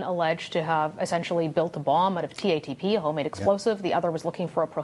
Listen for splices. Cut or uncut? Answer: uncut